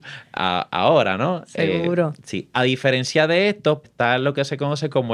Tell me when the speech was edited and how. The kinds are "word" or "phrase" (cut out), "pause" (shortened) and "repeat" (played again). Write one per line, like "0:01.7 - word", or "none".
0:03.8 - word